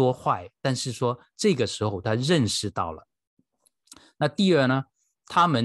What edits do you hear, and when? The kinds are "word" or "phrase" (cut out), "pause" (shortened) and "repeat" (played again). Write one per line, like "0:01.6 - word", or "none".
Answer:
none